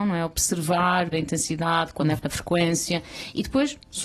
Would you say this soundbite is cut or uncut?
cut